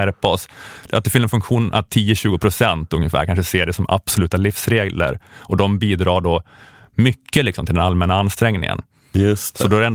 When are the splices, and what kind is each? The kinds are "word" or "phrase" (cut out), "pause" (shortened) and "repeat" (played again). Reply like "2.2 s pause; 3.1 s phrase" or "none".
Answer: none